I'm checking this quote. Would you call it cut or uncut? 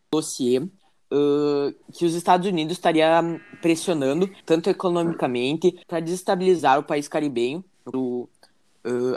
cut